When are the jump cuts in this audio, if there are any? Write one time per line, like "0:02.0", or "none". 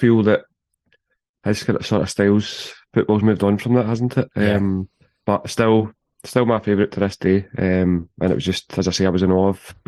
0:05.2